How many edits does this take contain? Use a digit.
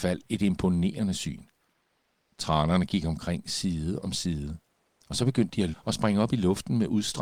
1